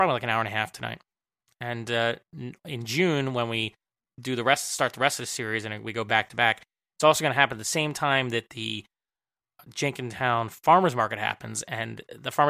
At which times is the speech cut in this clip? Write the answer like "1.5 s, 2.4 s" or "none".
none